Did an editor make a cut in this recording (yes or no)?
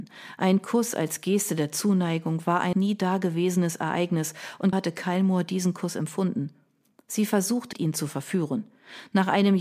yes